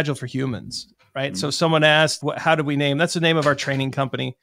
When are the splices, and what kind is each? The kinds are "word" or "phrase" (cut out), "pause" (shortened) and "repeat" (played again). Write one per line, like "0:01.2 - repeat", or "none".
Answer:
0:02.2 - word